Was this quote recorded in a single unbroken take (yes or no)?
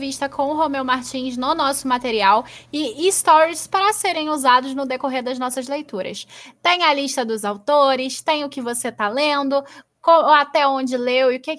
yes